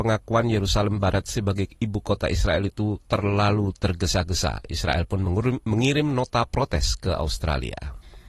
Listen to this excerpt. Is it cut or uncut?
uncut